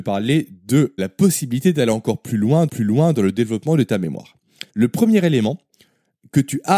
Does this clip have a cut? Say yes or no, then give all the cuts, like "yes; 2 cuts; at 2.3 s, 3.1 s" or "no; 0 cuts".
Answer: yes; 3 cuts; at 1.0 s, 2.7 s, 4.7 s